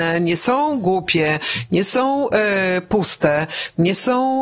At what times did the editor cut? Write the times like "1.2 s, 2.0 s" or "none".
none